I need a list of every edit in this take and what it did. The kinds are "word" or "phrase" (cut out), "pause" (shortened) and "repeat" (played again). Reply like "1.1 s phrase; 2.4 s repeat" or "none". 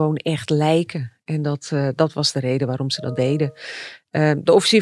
none